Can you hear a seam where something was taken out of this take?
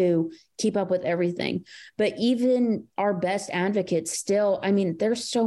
no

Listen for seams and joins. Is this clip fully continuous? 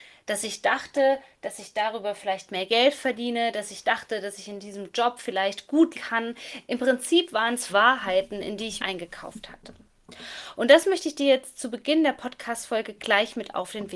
no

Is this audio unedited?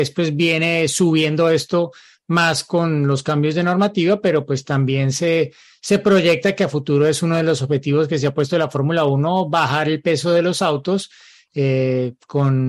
yes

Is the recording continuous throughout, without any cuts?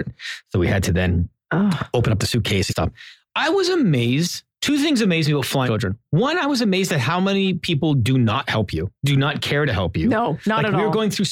no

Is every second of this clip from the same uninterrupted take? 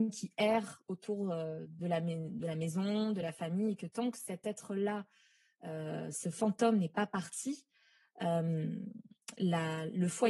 yes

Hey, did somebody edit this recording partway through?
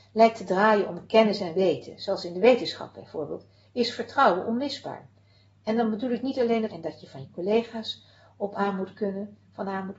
yes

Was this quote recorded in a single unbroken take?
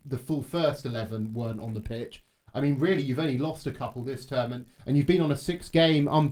yes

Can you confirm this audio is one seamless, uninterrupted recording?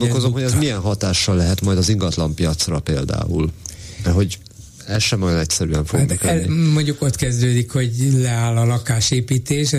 yes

